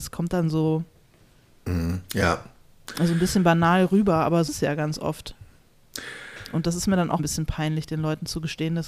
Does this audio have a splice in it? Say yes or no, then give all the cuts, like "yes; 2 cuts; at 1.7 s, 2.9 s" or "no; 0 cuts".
yes; 2 cuts; at 4.5 s, 7.2 s